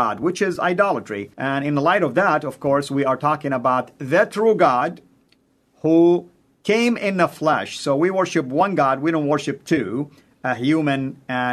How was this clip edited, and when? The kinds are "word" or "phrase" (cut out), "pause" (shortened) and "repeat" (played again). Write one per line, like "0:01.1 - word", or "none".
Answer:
0:01.3 - pause

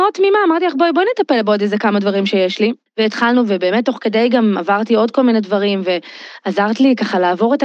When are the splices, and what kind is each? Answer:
none

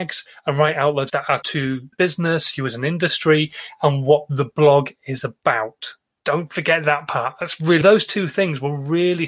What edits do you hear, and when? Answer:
0:01.1 - phrase
0:01.4 - word
0:01.9 - phrase
0:06.1 - pause
0:07.8 - phrase

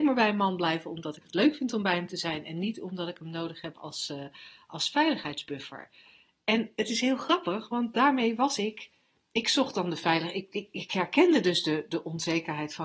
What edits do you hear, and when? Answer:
none

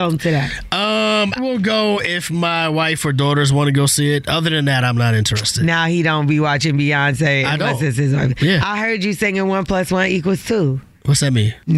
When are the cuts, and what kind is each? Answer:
0:01.4 - word

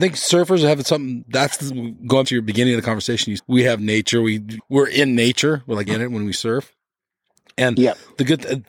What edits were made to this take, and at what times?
0:02.2 - word
0:03.4 - word
0:04.6 - word
0:05.9 - word

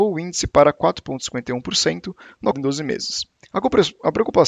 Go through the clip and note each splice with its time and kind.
0:02.5 - word

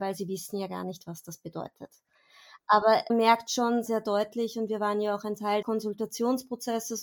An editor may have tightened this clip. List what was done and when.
0:03.1 - word
0:03.9 - word
0:05.6 - word

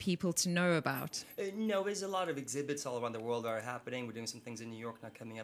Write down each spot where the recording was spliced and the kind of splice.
none

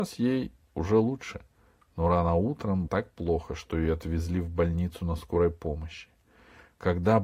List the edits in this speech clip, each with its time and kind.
0:02.9 - word

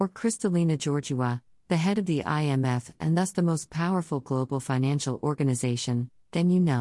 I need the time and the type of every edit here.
none

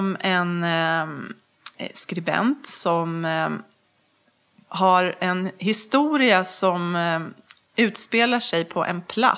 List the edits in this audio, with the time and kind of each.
none

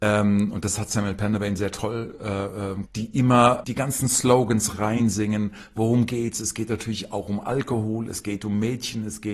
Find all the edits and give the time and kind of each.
0:02.9 - word
0:03.6 - word
0:04.7 - word

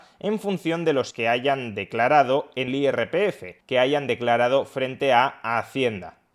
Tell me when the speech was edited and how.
0:01.1 - word
0:02.7 - word
0:03.6 - pause

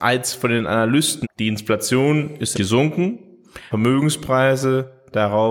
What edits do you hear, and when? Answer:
0:01.2 - word
0:02.5 - word
0:03.7 - word

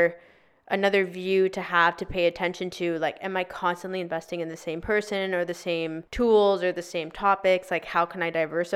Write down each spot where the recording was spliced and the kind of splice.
0:06.1 - pause

